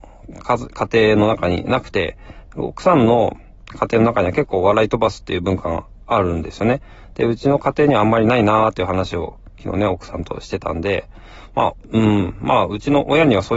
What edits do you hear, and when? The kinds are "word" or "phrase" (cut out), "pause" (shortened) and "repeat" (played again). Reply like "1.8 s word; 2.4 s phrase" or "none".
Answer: 2.5 s word